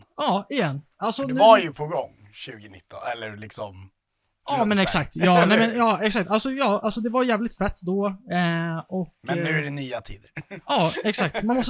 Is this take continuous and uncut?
yes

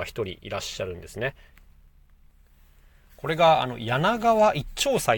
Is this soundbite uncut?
yes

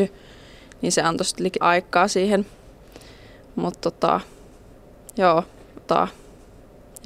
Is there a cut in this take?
yes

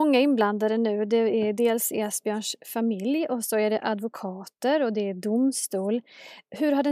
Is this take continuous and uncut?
yes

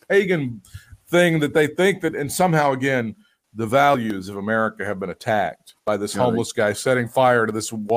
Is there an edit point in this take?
no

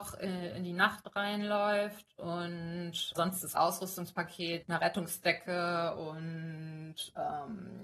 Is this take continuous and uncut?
no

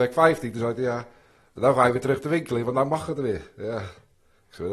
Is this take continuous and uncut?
yes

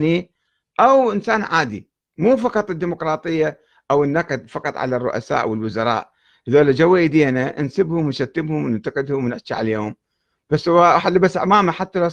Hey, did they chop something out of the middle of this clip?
yes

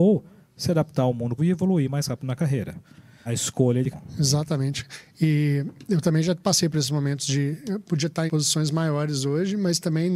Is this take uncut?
no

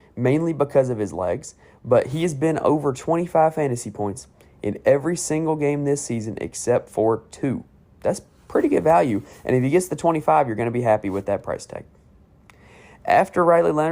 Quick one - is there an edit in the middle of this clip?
no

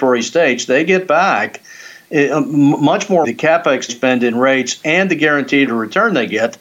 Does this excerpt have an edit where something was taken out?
yes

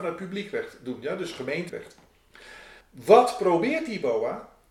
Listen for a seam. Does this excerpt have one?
yes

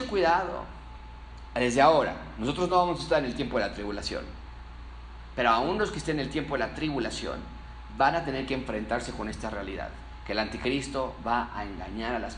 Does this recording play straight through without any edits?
yes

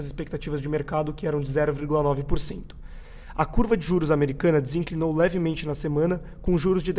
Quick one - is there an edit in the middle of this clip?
no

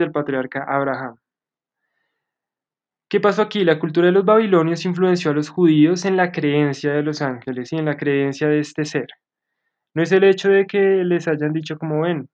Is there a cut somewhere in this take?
no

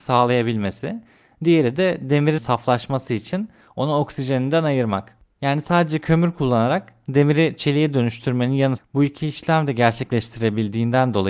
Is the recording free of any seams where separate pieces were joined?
no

